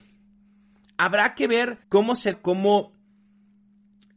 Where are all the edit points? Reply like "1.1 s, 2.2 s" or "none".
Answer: 1.8 s, 2.3 s